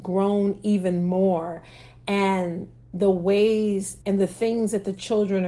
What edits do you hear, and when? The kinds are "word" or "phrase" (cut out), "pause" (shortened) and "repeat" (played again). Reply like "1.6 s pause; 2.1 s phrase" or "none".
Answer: 4.0 s pause